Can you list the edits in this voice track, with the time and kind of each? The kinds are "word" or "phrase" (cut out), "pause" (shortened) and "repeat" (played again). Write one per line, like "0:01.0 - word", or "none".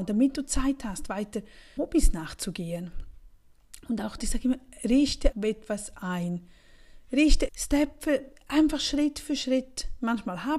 0:01.8 - word
0:04.2 - word
0:05.3 - word
0:07.5 - phrase